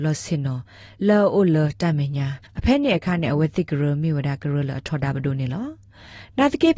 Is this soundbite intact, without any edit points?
no; 1 cut; at 2.5 s

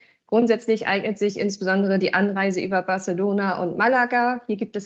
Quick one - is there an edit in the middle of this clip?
no; 0 cuts

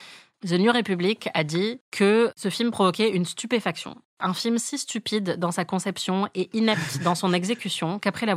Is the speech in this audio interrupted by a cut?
no; 0 cuts

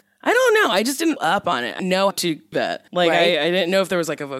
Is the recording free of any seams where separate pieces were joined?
no; 5 cuts; at 1.2 s, 1.8 s, 2.1 s, 2.5 s, 2.9 s

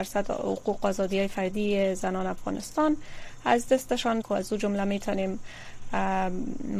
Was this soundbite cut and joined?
yes; 1 cut; at 4.2 s

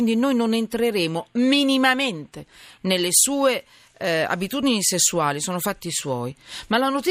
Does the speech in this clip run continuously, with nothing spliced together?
yes; 0 cuts

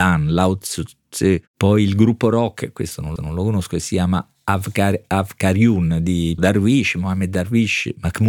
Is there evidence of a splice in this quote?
yes; 2 cuts; at 3.2 s, 6.4 s

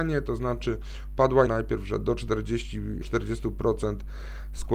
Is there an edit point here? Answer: yes; 2 cuts; at 1.5 s, 3.0 s

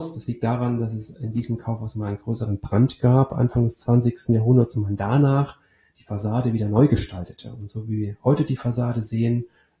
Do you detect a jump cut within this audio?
no; 0 cuts

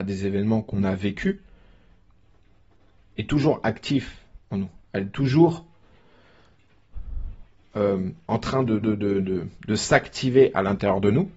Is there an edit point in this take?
yes; 1 cut; at 8.8 s

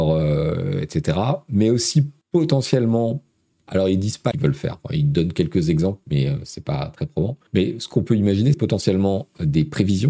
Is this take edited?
yes; 4 cuts; at 2.2 s, 4.3 s, 7.5 s, 8.5 s

